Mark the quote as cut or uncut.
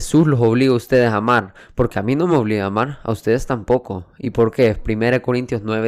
uncut